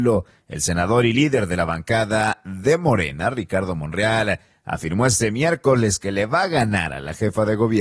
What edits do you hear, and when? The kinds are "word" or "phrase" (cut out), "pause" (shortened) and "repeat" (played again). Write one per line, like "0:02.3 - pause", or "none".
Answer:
none